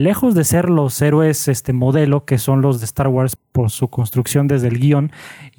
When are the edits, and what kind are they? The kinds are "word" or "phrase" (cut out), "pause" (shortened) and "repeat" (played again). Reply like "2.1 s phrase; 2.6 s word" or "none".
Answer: 3.4 s word